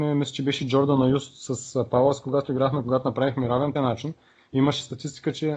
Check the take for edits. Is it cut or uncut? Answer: cut